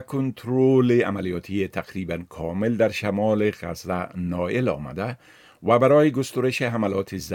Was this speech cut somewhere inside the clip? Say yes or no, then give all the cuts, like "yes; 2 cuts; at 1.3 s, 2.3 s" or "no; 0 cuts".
no; 0 cuts